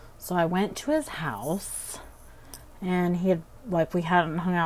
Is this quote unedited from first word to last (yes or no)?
yes